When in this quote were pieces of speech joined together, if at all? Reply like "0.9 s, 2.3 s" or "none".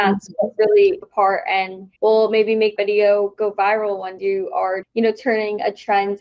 1.0 s, 2.0 s, 2.8 s, 4.2 s, 4.8 s